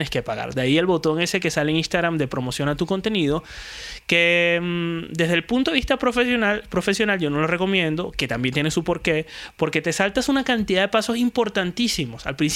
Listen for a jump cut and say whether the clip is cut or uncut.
uncut